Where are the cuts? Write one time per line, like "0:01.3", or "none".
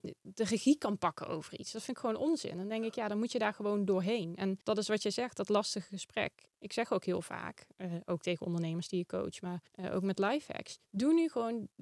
0:04.6
0:06.5
0:09.7
0:10.8